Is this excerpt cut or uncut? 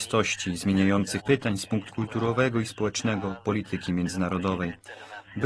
cut